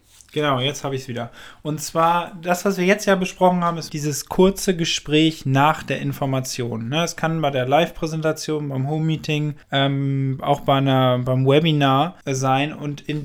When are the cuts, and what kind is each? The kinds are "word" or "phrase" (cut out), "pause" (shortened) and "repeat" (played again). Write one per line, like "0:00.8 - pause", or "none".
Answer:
0:03.9 - word
0:09.6 - pause
0:12.2 - pause